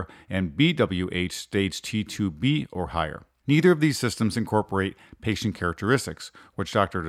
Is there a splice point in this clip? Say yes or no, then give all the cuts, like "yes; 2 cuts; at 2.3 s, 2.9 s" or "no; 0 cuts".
yes; 1 cut; at 3.3 s